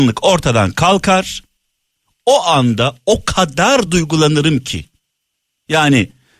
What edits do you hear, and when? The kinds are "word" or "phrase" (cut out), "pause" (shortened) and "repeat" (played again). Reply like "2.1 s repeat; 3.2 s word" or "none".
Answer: none